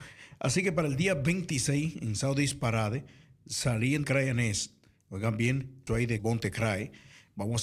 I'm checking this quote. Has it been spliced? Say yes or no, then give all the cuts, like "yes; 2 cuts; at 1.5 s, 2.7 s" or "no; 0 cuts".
yes; 3 cuts; at 4.0 s, 5.9 s, 6.2 s